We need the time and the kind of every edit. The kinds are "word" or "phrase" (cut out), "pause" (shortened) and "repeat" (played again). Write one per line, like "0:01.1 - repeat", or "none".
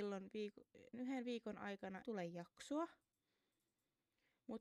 0:00.9 - word
0:02.0 - word